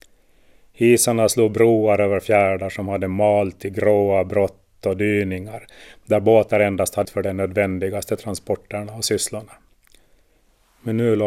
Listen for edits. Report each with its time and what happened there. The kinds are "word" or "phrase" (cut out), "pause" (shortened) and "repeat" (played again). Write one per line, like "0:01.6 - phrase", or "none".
0:07.0 - phrase